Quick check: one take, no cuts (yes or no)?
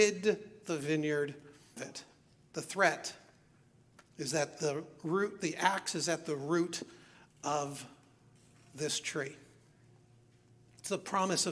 no